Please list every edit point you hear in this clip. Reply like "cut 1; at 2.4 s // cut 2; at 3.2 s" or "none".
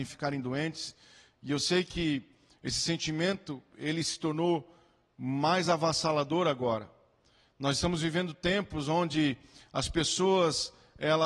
none